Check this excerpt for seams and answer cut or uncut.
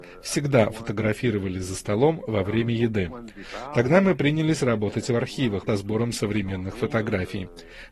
cut